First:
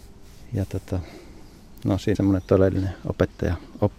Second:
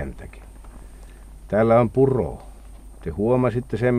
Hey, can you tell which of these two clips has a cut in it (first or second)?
first